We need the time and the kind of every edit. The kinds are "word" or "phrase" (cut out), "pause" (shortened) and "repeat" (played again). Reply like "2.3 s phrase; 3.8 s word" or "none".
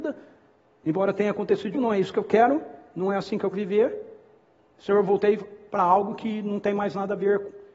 1.7 s word; 3.5 s word; 4.5 s pause